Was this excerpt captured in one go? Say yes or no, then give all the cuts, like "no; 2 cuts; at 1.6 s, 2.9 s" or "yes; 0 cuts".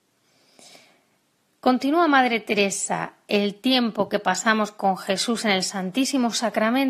yes; 0 cuts